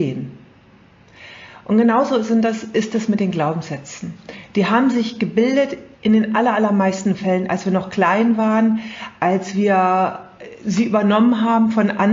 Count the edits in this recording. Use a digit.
1